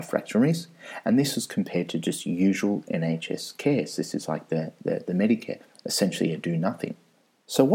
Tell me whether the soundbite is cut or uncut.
uncut